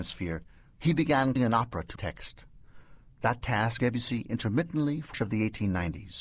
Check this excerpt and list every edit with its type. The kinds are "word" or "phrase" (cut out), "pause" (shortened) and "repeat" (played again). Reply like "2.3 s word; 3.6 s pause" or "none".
1.4 s word; 2.0 s word; 3.8 s word; 5.1 s word